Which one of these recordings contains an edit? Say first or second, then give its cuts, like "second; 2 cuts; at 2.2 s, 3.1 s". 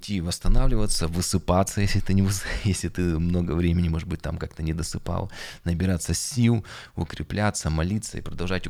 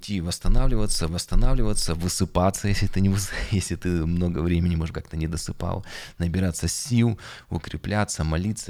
second; 2 cuts; at 1.1 s, 4.9 s